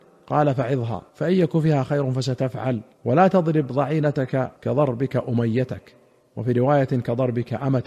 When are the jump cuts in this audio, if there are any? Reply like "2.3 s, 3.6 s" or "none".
1.1 s, 2.9 s, 4.6 s, 6.2 s